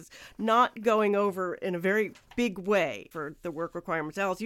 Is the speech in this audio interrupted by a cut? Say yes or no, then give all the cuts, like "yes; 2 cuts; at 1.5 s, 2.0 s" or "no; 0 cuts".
no; 0 cuts